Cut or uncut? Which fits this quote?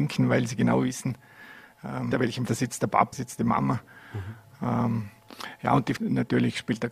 cut